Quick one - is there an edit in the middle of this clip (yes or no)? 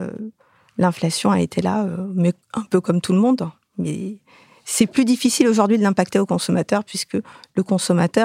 no